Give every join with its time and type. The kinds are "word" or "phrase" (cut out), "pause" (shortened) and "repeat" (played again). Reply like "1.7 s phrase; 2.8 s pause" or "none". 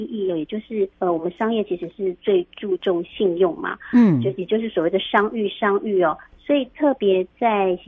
0.9 s pause